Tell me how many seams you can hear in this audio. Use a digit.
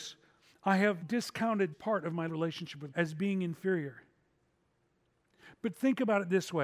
4